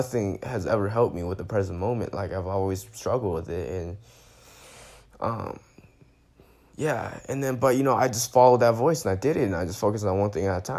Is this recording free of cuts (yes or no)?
yes